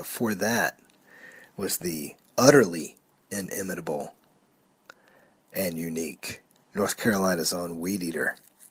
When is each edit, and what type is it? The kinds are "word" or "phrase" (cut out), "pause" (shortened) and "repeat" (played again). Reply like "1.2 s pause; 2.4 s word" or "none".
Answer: 6.5 s pause